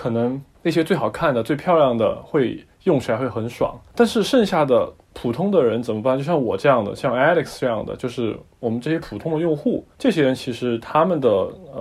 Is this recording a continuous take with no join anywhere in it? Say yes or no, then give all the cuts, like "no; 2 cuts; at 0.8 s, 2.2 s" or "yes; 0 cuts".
no; 1 cut; at 9.9 s